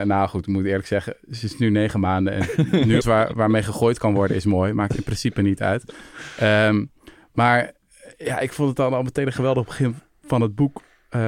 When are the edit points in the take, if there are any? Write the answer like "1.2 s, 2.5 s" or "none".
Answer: 3.0 s